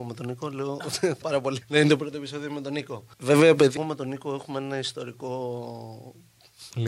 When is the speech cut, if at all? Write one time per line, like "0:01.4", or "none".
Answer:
0:01.2
0:01.6
0:03.1
0:03.8